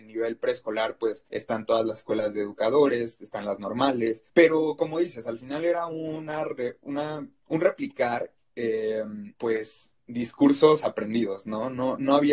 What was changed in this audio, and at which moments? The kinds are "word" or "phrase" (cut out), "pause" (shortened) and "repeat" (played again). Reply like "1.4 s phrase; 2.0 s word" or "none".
1.3 s pause; 4.3 s pause; 9.3 s pause